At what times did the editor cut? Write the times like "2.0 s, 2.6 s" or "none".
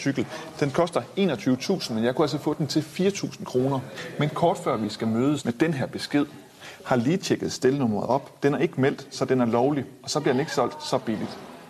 5.4 s